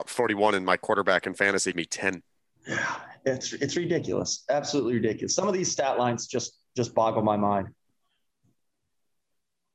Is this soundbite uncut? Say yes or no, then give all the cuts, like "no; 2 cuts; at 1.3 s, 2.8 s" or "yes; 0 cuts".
no; 2 cuts; at 1.7 s, 2.5 s